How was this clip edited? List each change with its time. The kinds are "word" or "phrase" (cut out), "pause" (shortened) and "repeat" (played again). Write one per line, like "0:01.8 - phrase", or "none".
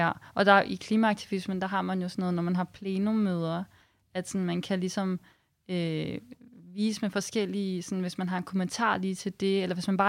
none